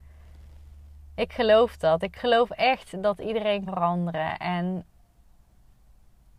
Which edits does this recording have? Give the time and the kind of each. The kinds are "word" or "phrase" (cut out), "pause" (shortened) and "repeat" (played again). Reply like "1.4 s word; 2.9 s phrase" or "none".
3.7 s word